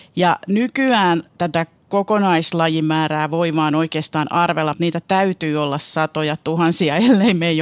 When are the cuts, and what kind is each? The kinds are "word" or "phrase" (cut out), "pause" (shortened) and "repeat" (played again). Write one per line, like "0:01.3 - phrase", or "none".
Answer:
none